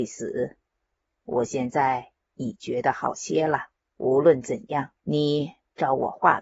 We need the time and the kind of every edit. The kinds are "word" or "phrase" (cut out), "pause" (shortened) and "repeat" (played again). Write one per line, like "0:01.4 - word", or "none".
0:03.8 - pause
0:05.0 - pause